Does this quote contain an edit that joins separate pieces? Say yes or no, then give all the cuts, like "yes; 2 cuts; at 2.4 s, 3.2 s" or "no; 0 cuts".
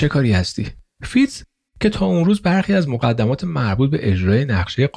no; 0 cuts